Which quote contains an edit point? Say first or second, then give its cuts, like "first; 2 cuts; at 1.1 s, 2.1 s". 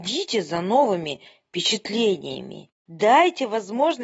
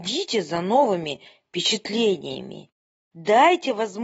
first; 1 cut; at 2.8 s